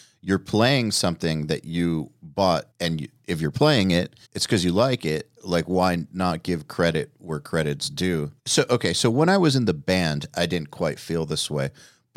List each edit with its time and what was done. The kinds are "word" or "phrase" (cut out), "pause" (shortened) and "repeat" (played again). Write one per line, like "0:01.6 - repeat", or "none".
0:02.7 - pause
0:04.2 - pause
0:05.4 - pause
0:08.4 - pause